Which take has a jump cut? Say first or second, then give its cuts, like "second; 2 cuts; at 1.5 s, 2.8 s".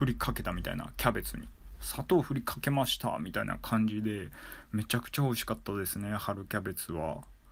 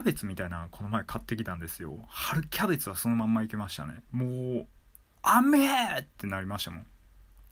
second; 1 cut; at 4.1 s